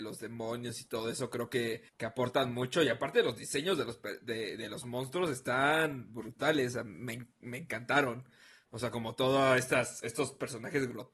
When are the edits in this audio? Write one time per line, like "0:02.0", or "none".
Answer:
0:01.9